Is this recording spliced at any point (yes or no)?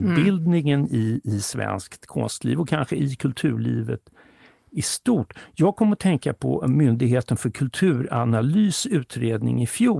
no